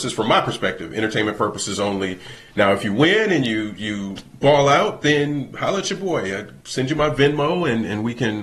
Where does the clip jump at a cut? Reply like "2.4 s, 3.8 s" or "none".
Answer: 6.6 s